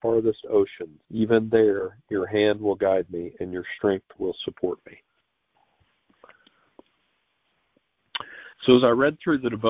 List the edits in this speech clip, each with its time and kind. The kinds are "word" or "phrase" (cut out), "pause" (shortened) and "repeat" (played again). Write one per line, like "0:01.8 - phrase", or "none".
0:01.0 - pause
0:08.5 - pause